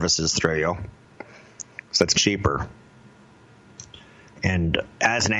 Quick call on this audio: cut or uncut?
cut